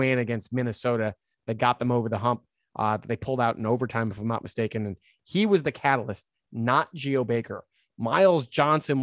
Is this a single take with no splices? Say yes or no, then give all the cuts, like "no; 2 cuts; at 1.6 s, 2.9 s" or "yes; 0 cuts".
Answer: yes; 0 cuts